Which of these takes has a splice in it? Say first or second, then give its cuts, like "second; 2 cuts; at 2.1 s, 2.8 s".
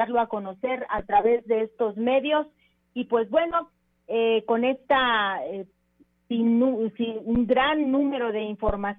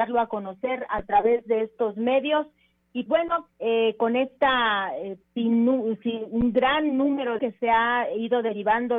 second; 4 cuts; at 3.1 s, 3.5 s, 5.2 s, 7.4 s